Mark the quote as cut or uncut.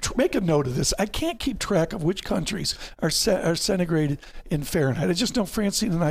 uncut